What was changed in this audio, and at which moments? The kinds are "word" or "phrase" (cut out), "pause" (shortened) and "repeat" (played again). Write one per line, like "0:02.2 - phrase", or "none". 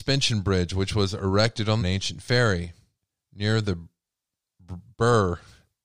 0:01.8 - phrase
0:02.9 - pause